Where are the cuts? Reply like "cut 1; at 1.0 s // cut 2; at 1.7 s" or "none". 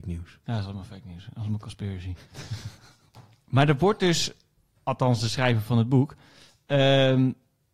none